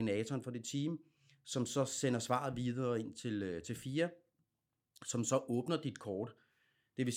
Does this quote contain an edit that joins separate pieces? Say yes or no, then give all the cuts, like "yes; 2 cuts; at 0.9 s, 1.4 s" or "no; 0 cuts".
no; 0 cuts